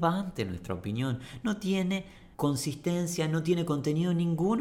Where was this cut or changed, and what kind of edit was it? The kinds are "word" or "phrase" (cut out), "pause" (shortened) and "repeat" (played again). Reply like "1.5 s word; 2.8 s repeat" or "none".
2.3 s pause